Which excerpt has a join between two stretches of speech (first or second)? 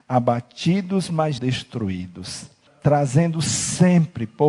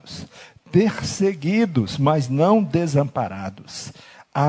first